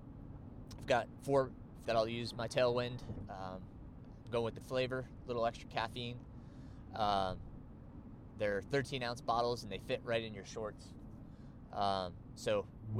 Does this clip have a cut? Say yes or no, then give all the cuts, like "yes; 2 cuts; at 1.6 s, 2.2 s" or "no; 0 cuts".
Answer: yes; 2 cuts; at 1.8 s, 4.6 s